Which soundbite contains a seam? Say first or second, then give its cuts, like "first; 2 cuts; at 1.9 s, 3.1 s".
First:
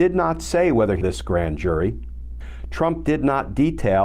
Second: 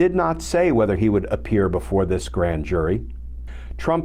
first; 1 cut; at 1.0 s